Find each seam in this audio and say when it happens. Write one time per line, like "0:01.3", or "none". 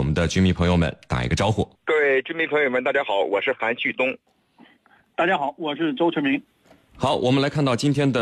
none